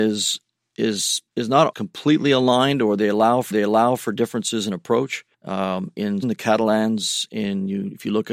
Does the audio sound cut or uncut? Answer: cut